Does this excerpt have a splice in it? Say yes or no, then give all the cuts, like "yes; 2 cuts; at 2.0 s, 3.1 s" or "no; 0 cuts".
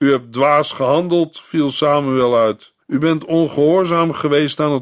yes; 1 cut; at 2.8 s